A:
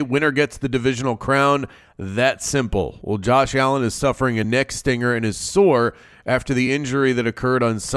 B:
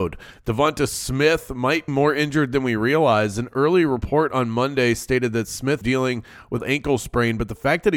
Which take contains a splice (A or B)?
B